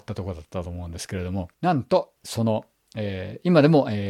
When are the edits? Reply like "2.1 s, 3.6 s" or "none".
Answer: 1.5 s, 2.2 s